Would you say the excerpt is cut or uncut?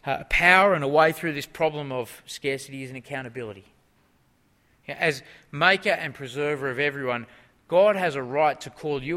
uncut